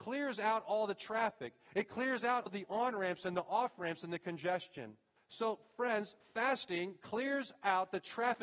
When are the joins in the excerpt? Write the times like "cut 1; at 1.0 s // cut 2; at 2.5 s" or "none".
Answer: cut 1; at 2.5 s // cut 2; at 5.2 s

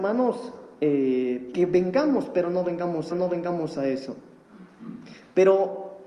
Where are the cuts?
cut 1; at 1.5 s // cut 2; at 3.1 s

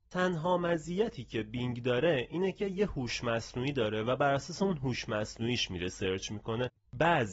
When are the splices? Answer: none

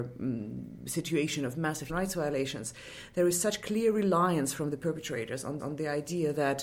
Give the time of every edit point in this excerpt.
cut 1; at 1.9 s // cut 2; at 5.6 s

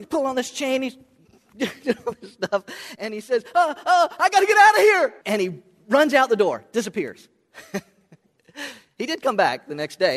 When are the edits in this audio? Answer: cut 1; at 5.2 s

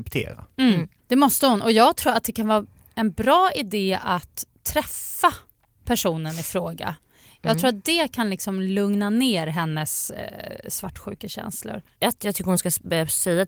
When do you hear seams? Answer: none

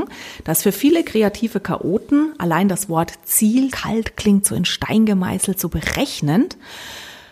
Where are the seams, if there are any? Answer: cut 1; at 3.7 s

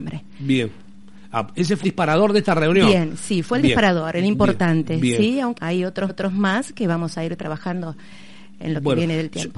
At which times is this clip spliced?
cut 1; at 1.8 s // cut 2; at 5.6 s // cut 3; at 6.1 s

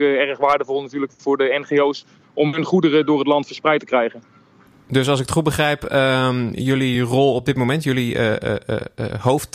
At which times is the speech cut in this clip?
none

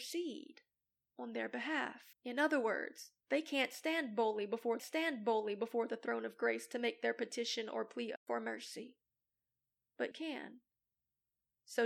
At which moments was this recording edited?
cut 1; at 2.1 s // cut 2; at 3.2 s // cut 3; at 4.8 s // cut 4; at 10.1 s

